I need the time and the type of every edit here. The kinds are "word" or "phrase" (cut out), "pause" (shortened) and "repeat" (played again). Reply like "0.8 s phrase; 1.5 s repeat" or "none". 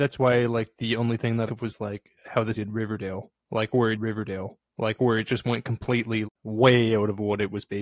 1.5 s phrase; 2.2 s pause; 2.5 s word; 3.9 s repeat; 6.2 s word